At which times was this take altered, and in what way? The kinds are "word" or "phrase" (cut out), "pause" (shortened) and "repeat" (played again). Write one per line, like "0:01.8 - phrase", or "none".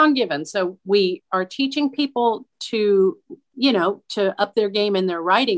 0:03.5 - word